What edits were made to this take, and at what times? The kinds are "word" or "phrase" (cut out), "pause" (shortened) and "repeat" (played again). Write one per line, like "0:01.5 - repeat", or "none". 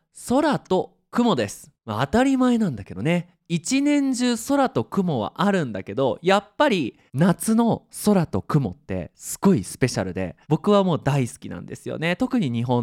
0:01.8 - pause
0:07.1 - pause
0:10.4 - pause